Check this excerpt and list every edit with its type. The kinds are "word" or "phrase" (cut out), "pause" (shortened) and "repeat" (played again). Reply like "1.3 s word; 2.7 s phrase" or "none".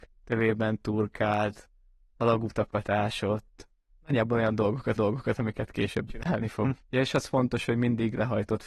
5.0 s repeat; 6.1 s word; 6.8 s pause